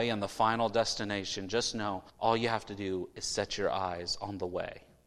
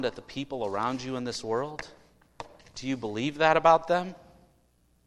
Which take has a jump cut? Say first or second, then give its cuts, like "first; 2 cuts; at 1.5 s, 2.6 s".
first; 1 cut; at 2.1 s